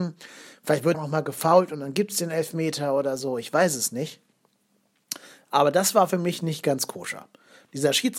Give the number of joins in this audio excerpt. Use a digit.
1